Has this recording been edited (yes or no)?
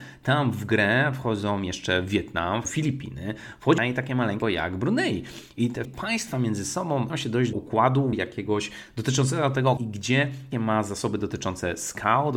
yes